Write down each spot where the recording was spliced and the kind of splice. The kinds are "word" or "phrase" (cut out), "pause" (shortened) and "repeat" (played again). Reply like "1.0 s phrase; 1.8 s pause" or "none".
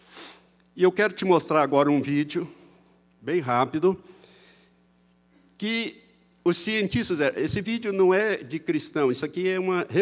none